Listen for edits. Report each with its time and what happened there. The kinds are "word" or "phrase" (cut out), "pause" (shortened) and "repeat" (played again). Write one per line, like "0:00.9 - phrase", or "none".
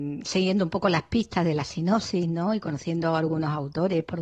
none

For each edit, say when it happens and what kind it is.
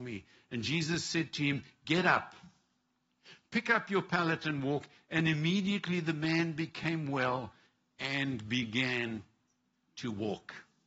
none

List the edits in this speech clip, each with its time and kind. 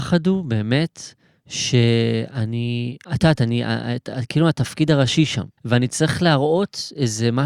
0:03.0 - pause
0:05.6 - pause

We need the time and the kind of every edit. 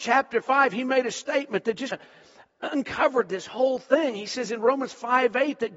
0:01.9 - word

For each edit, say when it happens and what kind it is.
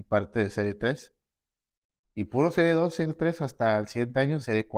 none

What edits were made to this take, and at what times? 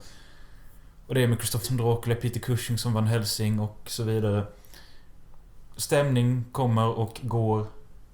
0:01.6 - word

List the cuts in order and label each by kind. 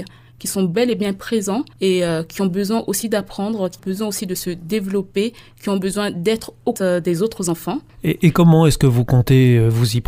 0:01.7 - pause
0:03.8 - word
0:06.8 - word

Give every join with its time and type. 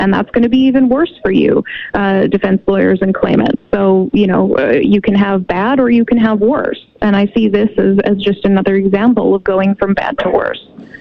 none

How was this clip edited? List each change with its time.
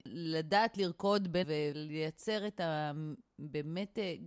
0:01.4 - word

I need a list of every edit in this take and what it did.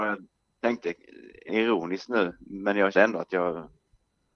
0:01.5 - word
0:02.9 - word

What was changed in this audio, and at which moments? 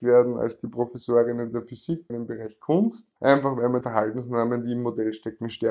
0:02.1 - phrase
0:03.2 - pause
0:03.8 - word

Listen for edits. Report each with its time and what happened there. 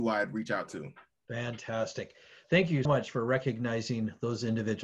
0:01.2 - pause
0:02.8 - word

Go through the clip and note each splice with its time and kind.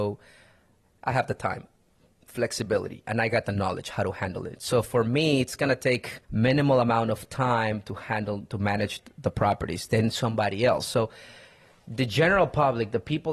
0:06.2 - pause

